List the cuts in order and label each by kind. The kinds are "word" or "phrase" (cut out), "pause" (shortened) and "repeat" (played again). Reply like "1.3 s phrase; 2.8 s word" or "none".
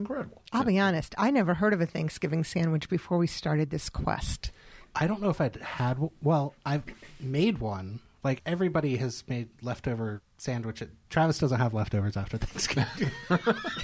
10.3 s pause